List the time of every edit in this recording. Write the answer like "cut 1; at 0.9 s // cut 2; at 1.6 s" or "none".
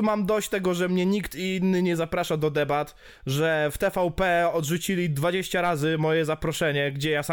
none